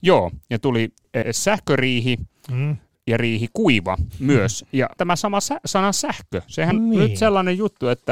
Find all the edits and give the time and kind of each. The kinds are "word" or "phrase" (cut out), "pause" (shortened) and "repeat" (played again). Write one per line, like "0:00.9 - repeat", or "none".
0:01.2 - word
0:05.0 - word
0:06.7 - word